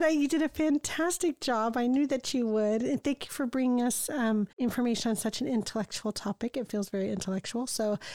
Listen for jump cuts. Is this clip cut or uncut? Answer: cut